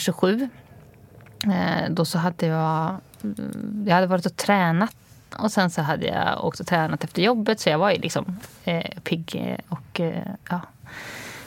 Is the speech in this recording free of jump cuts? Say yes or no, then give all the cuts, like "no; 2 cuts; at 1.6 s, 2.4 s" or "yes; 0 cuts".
no; 2 cuts; at 5.3 s, 9.6 s